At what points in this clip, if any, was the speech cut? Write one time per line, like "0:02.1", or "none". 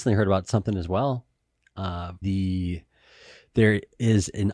0:02.2